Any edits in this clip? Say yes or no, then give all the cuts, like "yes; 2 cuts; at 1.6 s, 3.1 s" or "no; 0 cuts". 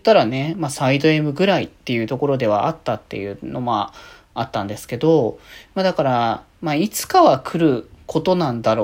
no; 0 cuts